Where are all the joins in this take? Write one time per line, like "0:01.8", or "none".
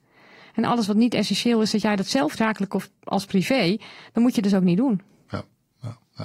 0:02.4